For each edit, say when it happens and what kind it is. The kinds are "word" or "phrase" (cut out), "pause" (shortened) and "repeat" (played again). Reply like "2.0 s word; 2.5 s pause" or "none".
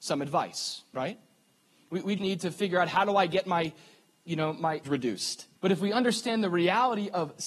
2.2 s word; 4.8 s word; 5.6 s pause